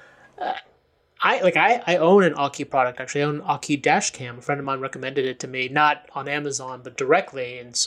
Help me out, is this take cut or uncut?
uncut